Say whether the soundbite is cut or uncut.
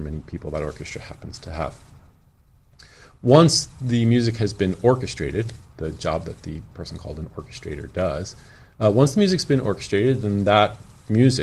uncut